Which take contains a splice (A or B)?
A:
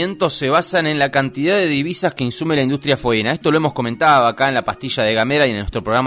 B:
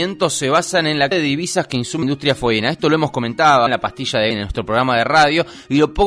B